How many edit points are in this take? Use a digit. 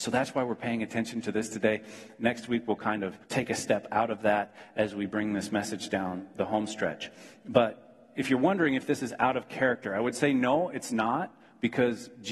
1